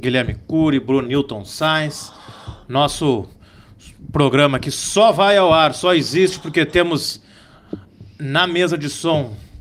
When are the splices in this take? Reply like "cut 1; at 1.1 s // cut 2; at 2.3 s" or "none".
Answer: cut 1; at 1.0 s